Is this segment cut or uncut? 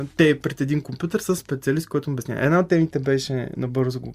cut